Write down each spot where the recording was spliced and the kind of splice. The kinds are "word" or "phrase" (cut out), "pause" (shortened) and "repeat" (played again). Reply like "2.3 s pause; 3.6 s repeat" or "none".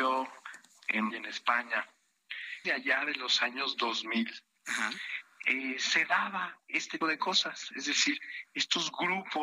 1.1 s word; 2.6 s phrase; 7.0 s word